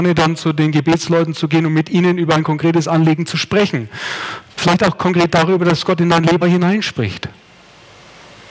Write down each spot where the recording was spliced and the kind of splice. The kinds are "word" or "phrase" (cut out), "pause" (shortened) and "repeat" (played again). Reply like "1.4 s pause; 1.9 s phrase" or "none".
4.5 s pause; 6.4 s word